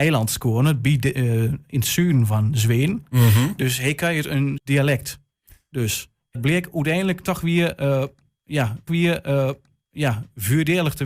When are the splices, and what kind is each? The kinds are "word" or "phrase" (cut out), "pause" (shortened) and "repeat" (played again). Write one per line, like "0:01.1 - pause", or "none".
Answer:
0:04.6 - word
0:06.3 - word
0:08.9 - repeat